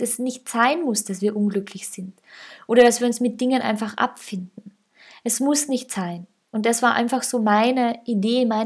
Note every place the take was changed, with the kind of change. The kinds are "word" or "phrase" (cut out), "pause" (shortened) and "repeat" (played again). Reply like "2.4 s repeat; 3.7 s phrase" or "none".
none